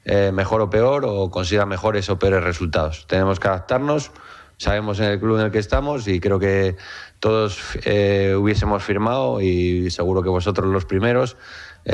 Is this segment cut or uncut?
uncut